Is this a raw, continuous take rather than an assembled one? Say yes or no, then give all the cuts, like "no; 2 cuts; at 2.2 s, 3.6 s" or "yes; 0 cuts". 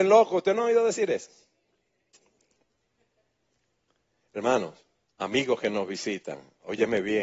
no; 1 cut; at 5.0 s